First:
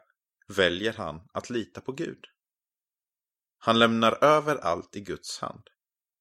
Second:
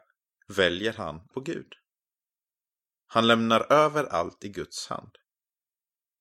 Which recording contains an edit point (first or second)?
second